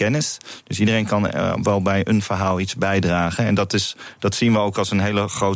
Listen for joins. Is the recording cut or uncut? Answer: uncut